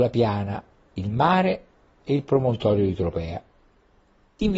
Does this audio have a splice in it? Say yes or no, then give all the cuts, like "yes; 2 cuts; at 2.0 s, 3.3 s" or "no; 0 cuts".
no; 0 cuts